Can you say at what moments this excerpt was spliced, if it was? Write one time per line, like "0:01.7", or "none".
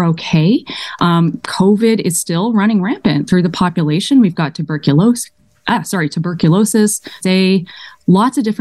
0:07.2